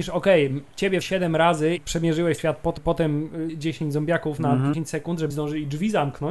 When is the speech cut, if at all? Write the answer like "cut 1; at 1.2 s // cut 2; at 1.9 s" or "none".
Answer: cut 1; at 1.0 s // cut 2; at 1.8 s // cut 3; at 2.4 s // cut 4; at 2.8 s // cut 5; at 3.5 s // cut 6; at 4.7 s // cut 7; at 5.3 s